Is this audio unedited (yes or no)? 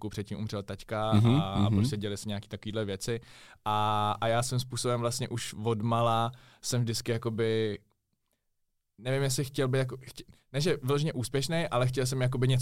yes